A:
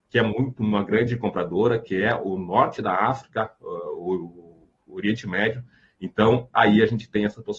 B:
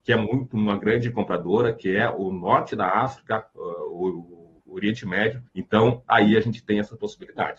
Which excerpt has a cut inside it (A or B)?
B